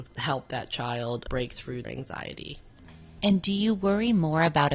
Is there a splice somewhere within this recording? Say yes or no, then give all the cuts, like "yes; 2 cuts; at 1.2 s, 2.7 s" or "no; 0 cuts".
yes; 1 cut; at 1.8 s